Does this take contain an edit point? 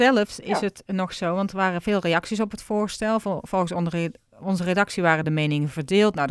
no; 0 cuts

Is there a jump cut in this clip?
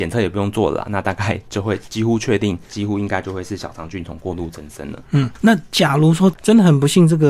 yes; 1 cut; at 2.7 s

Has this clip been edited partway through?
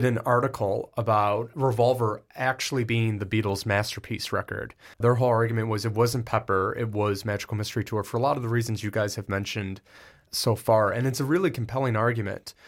yes; 1 cut; at 4.9 s

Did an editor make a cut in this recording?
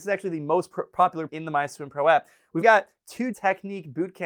yes; 3 cuts; at 1.3 s, 2.6 s, 3.3 s

